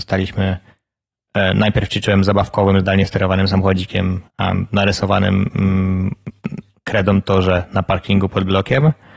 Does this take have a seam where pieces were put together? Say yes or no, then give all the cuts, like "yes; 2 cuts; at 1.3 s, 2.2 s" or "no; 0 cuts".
yes; 1 cut; at 4.3 s